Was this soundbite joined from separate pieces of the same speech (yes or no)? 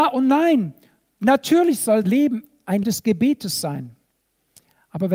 yes